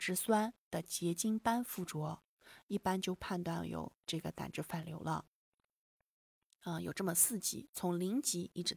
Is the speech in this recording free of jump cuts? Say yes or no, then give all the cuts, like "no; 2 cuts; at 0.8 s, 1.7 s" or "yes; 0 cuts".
yes; 0 cuts